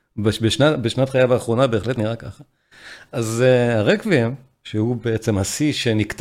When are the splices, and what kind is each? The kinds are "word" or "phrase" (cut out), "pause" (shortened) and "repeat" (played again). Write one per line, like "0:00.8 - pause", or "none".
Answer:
none